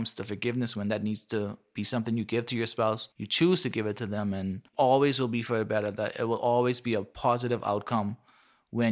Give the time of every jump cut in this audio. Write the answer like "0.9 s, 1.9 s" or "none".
3.1 s, 4.7 s